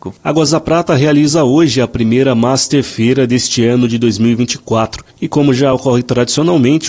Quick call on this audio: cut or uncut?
uncut